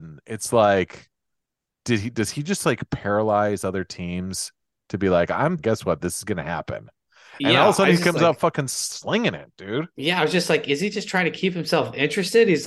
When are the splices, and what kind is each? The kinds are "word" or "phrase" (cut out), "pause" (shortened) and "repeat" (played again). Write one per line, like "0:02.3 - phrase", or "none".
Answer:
0:05.6 - phrase